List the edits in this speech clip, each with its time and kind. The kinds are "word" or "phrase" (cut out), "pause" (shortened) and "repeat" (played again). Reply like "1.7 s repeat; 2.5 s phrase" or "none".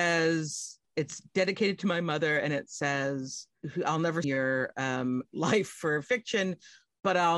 4.2 s phrase